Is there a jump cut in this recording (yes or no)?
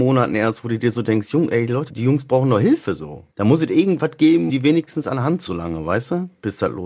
yes